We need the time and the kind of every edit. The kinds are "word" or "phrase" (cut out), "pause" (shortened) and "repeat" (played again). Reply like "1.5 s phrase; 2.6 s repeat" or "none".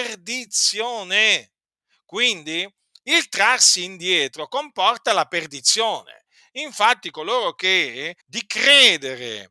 8.2 s word